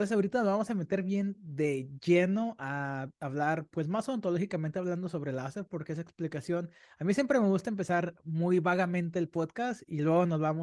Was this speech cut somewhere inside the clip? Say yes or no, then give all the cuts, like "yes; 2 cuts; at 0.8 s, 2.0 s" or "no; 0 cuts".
no; 0 cuts